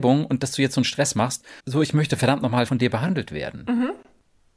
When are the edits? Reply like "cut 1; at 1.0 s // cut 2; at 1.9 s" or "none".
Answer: cut 1; at 1.6 s // cut 2; at 2.7 s